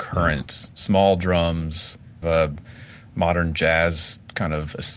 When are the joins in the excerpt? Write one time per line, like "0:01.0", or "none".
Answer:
0:02.2